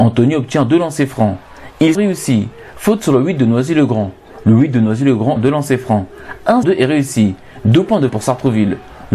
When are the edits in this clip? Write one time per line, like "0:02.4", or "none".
0:01.9
0:05.4
0:06.6
0:08.1